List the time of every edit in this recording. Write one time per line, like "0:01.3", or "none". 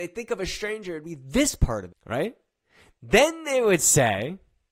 0:01.9

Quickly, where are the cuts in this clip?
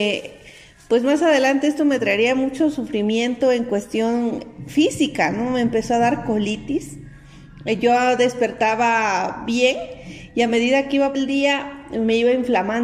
0:11.1

